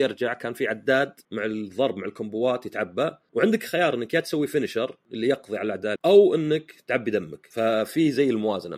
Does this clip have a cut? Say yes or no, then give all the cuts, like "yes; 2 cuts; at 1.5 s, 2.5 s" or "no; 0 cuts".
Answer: yes; 1 cut; at 6.0 s